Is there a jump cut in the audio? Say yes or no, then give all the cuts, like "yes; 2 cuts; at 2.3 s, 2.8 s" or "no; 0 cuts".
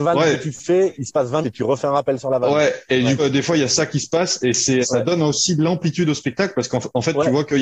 yes; 3 cuts; at 1.4 s, 3.2 s, 4.8 s